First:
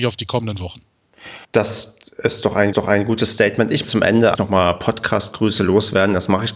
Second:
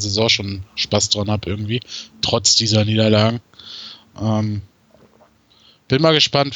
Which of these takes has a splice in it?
first; 4 cuts; at 1.4 s, 2.7 s, 3.8 s, 4.3 s

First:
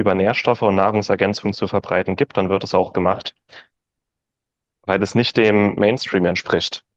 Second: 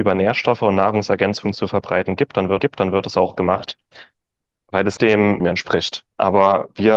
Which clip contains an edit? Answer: second; 4 cuts; at 2.6 s, 4.5 s, 5.0 s, 5.4 s

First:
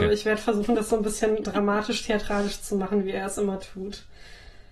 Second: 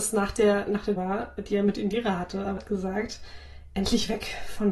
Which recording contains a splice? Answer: second; 2 cuts; at 1.0 s, 2.6 s

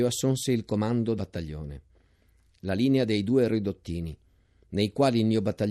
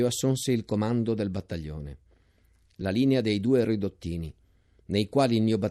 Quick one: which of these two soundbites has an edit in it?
first; 1 cut; at 1.2 s

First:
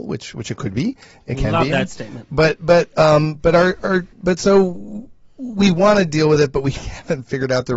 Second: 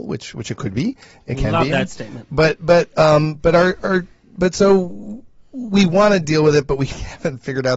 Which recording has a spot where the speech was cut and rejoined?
first; 1 cut; at 4.1 s

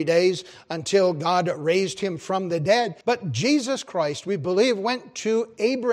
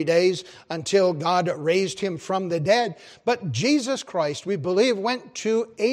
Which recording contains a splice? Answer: first; 1 cut; at 3.0 s

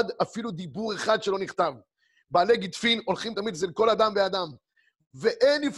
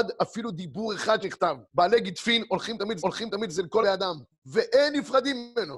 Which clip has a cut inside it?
second; 5 cuts; at 1.2 s, 1.7 s, 3.0 s, 3.8 s, 4.3 s

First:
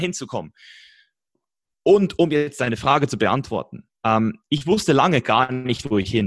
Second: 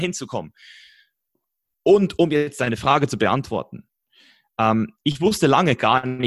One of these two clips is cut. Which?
first; 1 cut; at 3.9 s

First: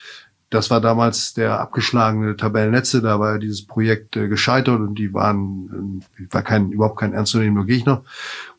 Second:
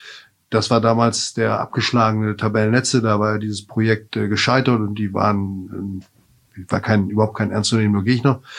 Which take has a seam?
first; 1 cut; at 6.1 s

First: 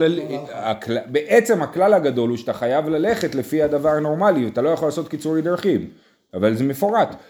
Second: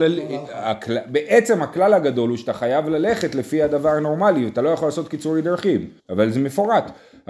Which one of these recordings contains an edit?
second; 1 cut; at 6.0 s

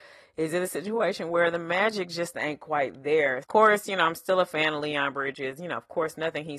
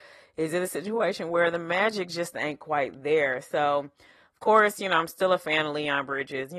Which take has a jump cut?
first; 1 cut; at 3.4 s

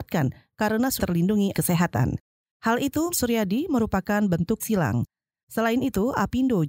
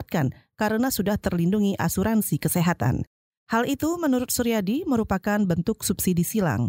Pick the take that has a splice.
first; 4 cuts; at 1.0 s, 1.5 s, 3.1 s, 4.6 s

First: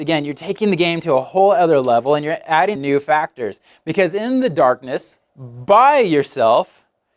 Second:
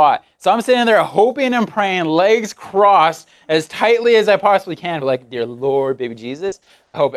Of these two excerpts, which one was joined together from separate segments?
first; 2 cuts; at 2.8 s, 5.3 s

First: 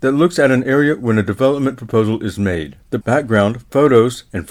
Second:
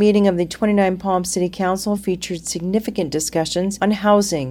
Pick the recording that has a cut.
first; 1 cut; at 3.0 s

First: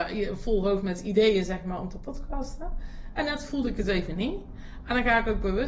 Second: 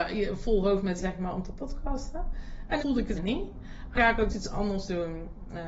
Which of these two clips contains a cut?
second; 5 cuts; at 1.0 s, 2.8 s, 3.1 s, 3.9 s, 4.3 s

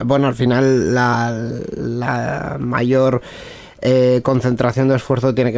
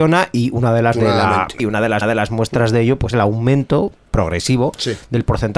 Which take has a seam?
second; 4 cuts; at 0.9 s, 1.6 s, 2.0 s, 3.1 s

